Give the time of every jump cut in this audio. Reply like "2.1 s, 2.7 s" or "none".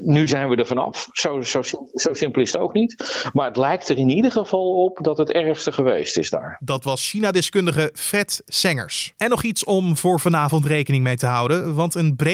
none